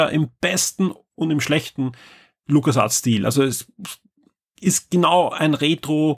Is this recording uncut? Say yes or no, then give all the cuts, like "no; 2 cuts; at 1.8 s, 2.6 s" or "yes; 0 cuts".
yes; 0 cuts